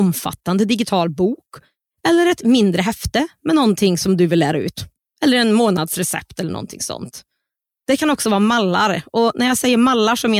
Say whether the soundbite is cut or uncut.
uncut